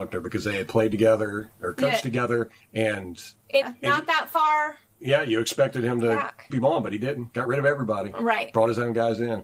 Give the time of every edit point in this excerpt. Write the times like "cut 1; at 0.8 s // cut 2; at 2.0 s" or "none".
cut 1; at 3.6 s // cut 2; at 6.5 s